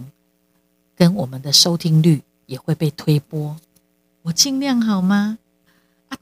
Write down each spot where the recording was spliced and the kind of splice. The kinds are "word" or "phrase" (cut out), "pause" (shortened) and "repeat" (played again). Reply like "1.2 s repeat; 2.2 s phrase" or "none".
none